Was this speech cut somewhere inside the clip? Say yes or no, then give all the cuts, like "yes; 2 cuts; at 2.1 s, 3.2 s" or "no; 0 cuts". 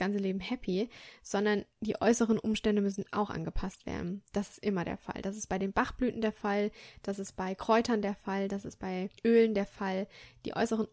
yes; 1 cut; at 9.2 s